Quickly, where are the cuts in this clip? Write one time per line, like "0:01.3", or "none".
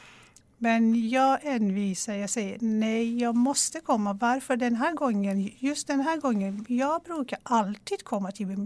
none